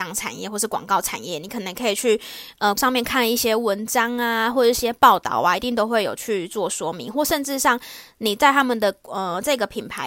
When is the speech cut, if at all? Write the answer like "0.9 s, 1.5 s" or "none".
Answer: 2.8 s